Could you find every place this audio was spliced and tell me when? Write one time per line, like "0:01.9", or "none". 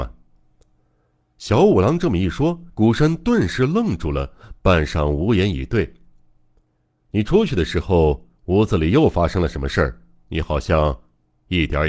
0:02.7
0:08.4